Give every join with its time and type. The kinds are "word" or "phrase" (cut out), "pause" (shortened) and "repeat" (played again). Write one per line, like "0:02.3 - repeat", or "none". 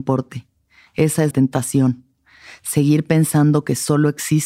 0:01.3 - word